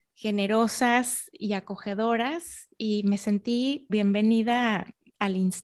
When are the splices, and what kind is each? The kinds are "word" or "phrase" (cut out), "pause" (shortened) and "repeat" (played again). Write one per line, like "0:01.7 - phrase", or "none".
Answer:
0:03.9 - word